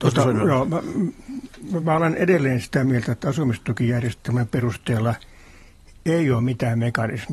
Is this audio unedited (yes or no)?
yes